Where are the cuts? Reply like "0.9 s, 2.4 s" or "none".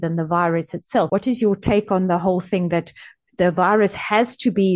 none

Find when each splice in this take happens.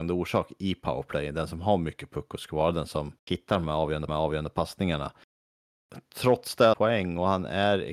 3.2 s, 4.1 s, 6.7 s

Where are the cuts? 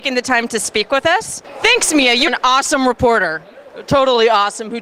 2.3 s

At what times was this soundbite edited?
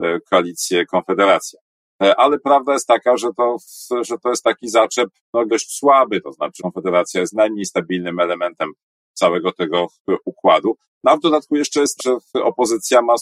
5.5 s, 6.6 s, 12.0 s

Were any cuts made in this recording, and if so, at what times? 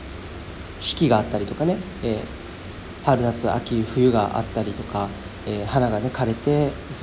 none

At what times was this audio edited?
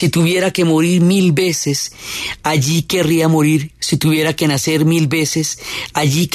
none

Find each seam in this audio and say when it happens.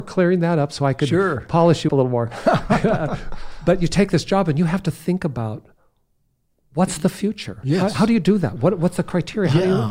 1.9 s

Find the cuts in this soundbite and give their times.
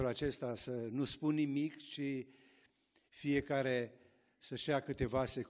none

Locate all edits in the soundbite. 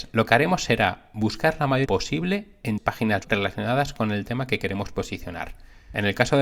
1.9 s, 2.8 s, 3.2 s

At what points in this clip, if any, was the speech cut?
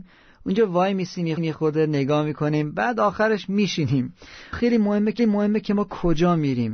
1.4 s, 4.5 s, 5.2 s

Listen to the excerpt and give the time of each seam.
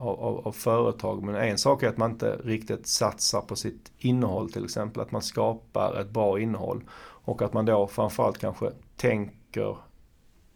none

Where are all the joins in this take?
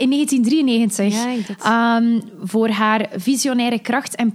1.4 s

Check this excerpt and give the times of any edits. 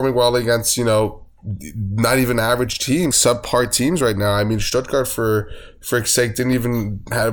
3.1 s

